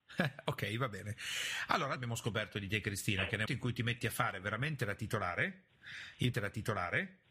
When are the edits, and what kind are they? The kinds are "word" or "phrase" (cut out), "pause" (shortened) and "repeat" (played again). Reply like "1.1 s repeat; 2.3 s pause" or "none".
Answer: 2.0 s phrase; 3.5 s word; 6.3 s repeat

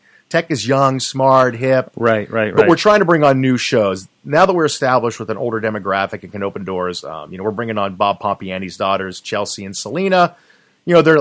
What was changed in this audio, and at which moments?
none

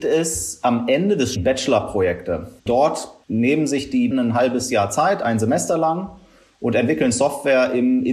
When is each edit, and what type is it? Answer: 1.4 s phrase; 2.6 s pause; 4.1 s word

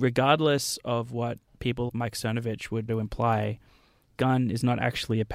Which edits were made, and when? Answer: 1.9 s word; 2.9 s word; 4.2 s word

